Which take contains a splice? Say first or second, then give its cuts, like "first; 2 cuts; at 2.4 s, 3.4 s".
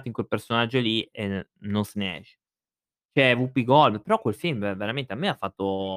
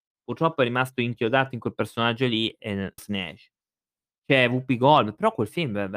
second; 1 cut; at 3.0 s